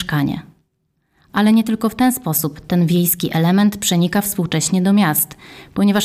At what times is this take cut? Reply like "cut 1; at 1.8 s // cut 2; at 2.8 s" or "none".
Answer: none